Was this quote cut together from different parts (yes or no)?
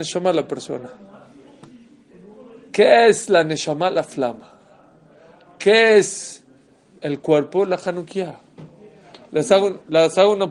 no